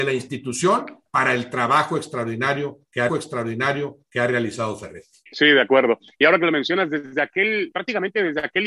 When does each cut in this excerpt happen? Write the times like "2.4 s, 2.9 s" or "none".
3.1 s, 5.3 s, 7.7 s